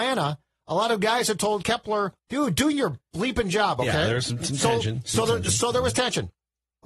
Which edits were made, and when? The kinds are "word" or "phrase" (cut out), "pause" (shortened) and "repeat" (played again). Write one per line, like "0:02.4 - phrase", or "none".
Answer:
0:02.2 - pause